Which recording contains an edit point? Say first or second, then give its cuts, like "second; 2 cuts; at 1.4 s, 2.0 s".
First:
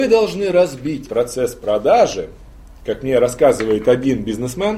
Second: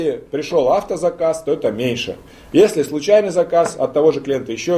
first; 1 cut; at 1.1 s